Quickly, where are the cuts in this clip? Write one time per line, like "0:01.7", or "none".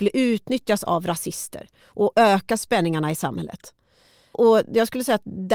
none